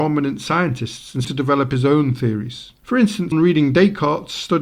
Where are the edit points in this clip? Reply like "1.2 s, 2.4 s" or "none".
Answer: 1.2 s, 2.8 s, 3.3 s